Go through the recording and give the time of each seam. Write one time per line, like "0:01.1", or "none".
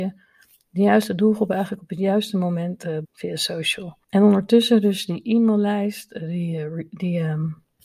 0:03.0
0:04.0